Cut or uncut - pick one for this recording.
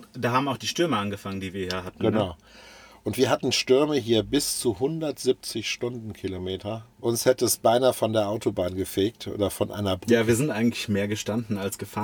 cut